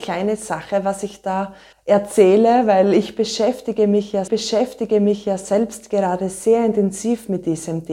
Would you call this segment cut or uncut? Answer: cut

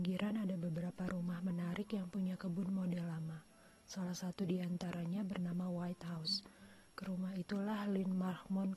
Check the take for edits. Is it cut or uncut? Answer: uncut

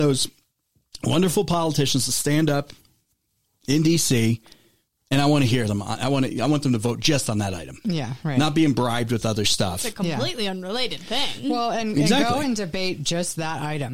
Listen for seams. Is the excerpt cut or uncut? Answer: uncut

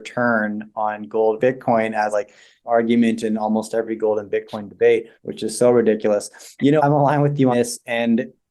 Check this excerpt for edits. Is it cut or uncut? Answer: cut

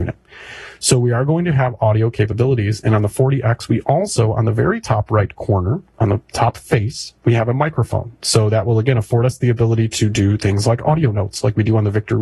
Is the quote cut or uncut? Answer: cut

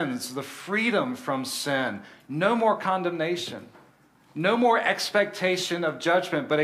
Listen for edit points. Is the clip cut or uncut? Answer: uncut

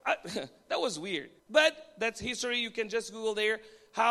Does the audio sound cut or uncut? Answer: cut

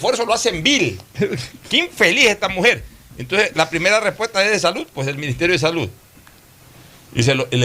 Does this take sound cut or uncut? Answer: uncut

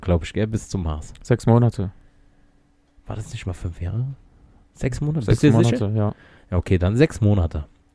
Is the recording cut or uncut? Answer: uncut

